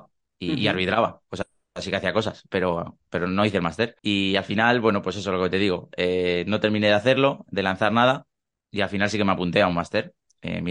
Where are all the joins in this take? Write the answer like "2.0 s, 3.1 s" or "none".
4.0 s